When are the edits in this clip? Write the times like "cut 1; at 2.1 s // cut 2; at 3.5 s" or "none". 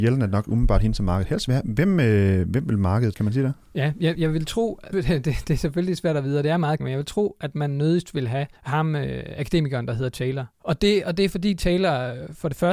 cut 1; at 3.1 s // cut 2; at 4.1 s // cut 3; at 4.9 s // cut 4; at 6.8 s // cut 5; at 8.6 s // cut 6; at 10.5 s